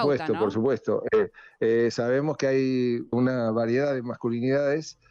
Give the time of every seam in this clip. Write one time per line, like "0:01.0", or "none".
0:03.1